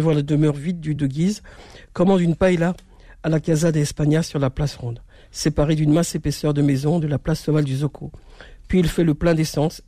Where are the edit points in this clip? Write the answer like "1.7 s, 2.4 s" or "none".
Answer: 1.0 s